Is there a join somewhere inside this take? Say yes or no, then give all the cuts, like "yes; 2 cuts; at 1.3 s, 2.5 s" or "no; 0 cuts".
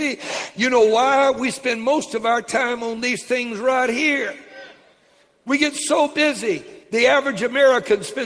no; 0 cuts